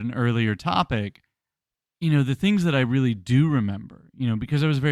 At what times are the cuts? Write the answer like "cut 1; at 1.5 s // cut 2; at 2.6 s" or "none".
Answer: none